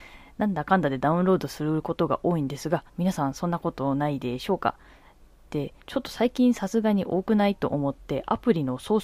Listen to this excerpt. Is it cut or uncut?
cut